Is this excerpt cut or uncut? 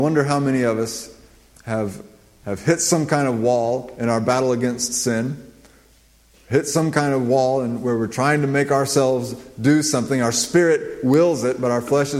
uncut